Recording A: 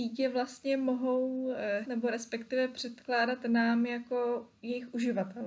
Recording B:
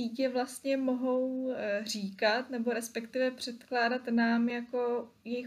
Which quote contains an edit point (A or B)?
A